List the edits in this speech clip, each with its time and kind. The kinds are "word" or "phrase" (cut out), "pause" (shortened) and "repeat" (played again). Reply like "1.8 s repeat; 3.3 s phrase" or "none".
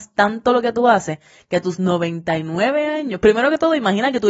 none